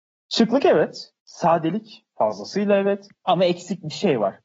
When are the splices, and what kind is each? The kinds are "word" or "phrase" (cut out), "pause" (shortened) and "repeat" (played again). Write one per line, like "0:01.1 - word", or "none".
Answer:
0:01.2 - pause
0:03.2 - pause